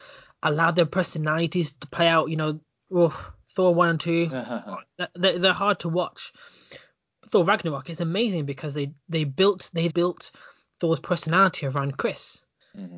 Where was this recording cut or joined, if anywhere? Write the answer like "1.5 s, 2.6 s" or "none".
2.9 s, 9.0 s, 9.9 s